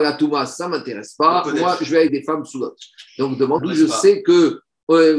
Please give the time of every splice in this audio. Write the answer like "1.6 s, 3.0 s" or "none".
2.1 s, 3.6 s